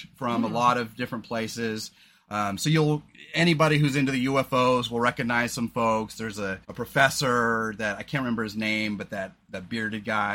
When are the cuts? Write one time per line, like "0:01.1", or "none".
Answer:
0:06.6

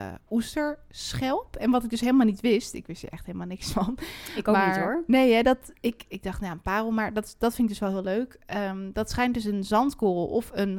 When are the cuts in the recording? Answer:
none

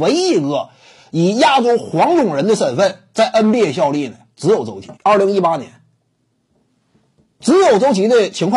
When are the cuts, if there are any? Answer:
0:05.0

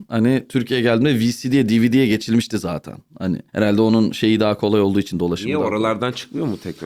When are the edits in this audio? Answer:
0:03.5

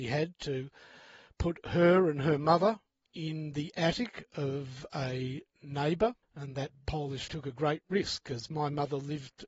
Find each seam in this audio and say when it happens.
0:03.0
0:06.2
0:07.3

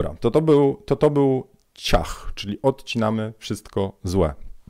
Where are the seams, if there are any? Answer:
none

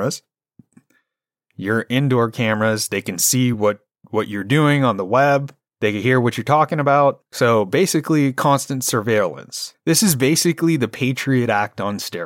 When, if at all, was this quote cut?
none

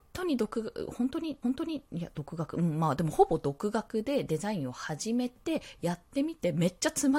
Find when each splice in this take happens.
0:01.4

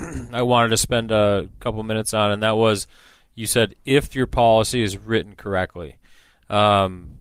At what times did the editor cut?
none

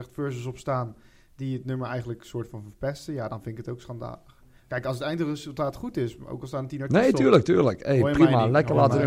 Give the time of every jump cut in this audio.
none

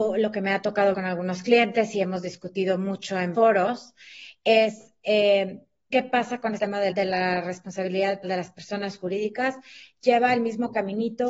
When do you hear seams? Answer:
0:00.9
0:03.3
0:05.9
0:06.6
0:06.9
0:08.2

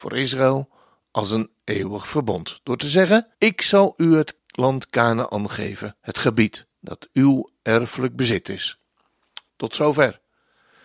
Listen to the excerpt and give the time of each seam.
0:03.3
0:04.4
0:06.0
0:06.7
0:09.5

